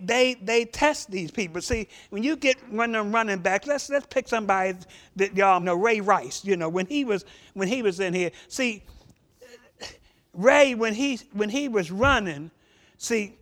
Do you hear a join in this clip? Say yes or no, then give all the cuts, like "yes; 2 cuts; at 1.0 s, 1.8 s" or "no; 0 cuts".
yes; 1 cut; at 5.6 s